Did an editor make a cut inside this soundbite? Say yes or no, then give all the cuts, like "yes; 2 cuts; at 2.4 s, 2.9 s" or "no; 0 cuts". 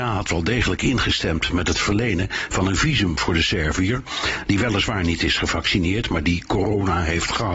no; 0 cuts